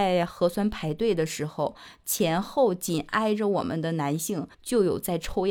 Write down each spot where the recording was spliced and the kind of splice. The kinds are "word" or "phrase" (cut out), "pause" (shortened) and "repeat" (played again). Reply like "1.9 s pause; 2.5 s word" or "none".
4.5 s pause